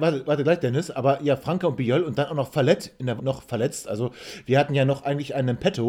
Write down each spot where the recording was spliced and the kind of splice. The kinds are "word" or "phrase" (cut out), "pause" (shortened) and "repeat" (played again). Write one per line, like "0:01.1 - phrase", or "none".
0:03.2 - word

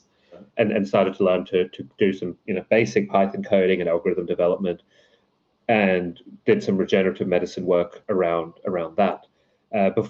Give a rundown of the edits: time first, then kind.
none

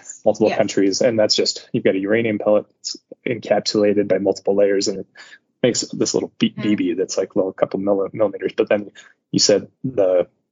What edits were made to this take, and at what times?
none

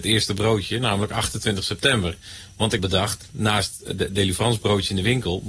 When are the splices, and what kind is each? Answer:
0:02.8 - word

